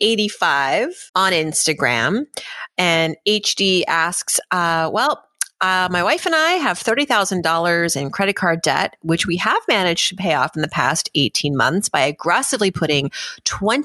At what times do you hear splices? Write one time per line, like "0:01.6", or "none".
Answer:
0:01.1